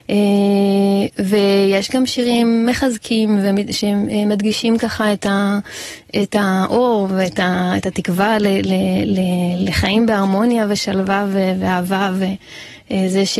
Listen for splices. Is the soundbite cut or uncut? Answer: uncut